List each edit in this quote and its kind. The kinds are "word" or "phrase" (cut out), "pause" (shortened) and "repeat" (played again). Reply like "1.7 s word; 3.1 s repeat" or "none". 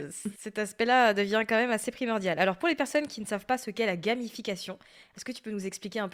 none